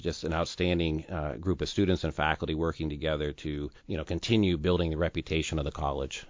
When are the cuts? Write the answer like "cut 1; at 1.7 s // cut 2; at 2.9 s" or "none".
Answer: cut 1; at 3.8 s